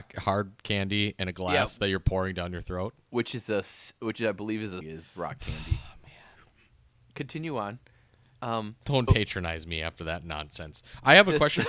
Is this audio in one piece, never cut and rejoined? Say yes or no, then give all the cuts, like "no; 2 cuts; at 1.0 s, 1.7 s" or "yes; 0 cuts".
no; 2 cuts; at 4.8 s, 9.1 s